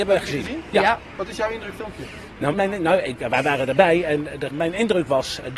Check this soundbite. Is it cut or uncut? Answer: cut